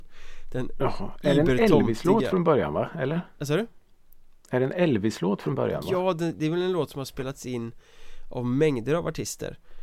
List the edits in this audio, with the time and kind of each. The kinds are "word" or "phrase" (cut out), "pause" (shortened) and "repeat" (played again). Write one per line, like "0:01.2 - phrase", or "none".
none